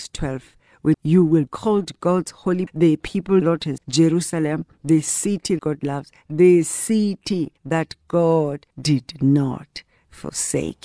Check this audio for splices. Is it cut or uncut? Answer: cut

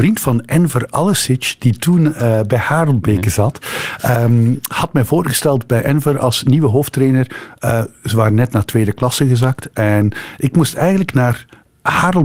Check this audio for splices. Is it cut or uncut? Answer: uncut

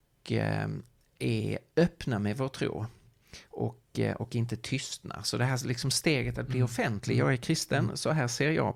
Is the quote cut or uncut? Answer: uncut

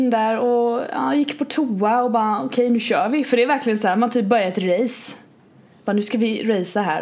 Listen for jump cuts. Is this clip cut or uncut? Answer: uncut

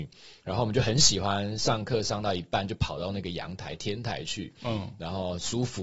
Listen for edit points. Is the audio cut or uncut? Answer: uncut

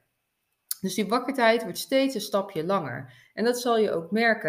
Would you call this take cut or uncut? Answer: uncut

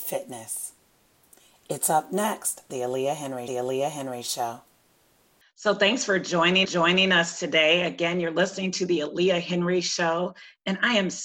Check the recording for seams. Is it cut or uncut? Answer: cut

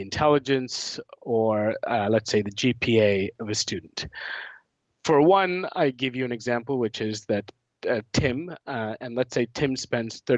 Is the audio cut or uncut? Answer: uncut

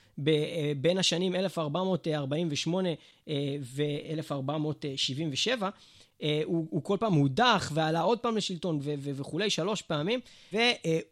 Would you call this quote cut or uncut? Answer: uncut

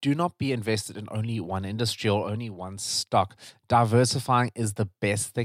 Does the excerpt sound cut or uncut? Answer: uncut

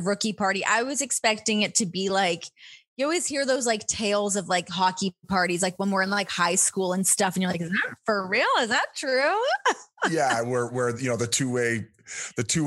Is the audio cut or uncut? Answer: uncut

